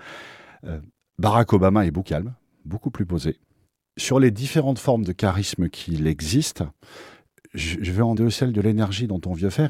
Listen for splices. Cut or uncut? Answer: cut